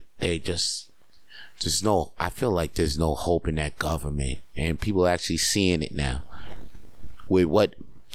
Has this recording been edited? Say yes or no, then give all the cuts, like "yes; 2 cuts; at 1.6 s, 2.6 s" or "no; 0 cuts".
no; 0 cuts